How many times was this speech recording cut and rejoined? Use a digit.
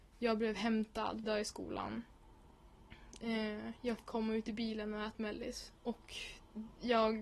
4